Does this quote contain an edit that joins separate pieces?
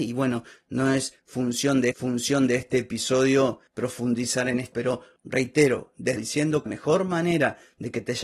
yes; 4 cuts; at 1.9 s, 4.7 s, 6.2 s, 6.7 s

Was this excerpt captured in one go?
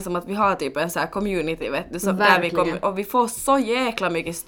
yes; 0 cuts

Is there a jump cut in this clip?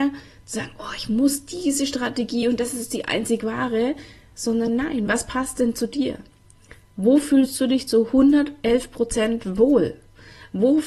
no; 0 cuts

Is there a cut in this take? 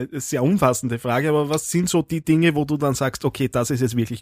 no; 0 cuts

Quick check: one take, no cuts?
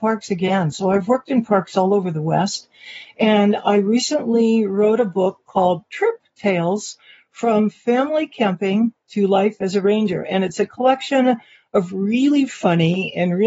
yes; 0 cuts

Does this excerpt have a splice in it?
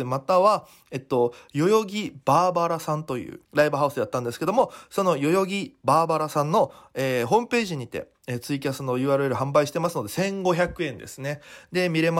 yes; 1 cut; at 3.4 s

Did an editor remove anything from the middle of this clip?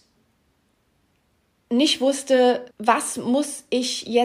yes; 1 cut; at 2.7 s

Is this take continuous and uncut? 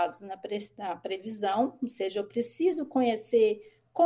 yes; 0 cuts

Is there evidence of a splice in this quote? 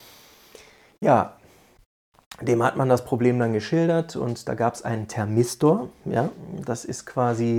no; 0 cuts

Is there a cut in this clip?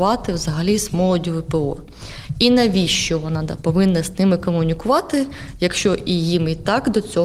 no; 0 cuts

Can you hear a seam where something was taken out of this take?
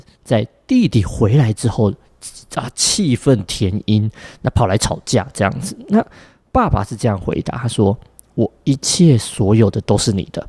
no; 0 cuts

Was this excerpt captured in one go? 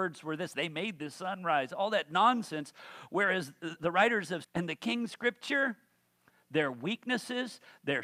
no; 3 cuts; at 3.8 s, 4.4 s, 5.1 s

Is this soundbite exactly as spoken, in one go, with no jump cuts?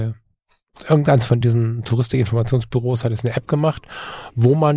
yes; 0 cuts

